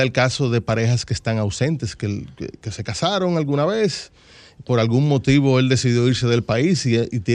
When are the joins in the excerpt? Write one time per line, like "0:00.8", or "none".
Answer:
none